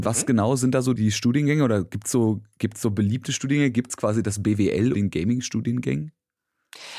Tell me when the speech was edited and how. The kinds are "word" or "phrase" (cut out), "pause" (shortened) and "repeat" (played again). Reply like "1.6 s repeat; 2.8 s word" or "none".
1.0 s word; 4.9 s word